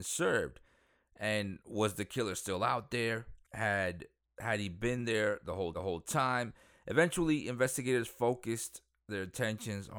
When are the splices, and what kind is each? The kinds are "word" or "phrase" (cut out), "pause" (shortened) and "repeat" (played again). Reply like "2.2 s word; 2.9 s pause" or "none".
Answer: 3.4 s pause; 5.7 s repeat